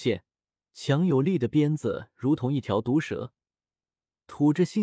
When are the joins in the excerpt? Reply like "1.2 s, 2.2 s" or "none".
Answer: none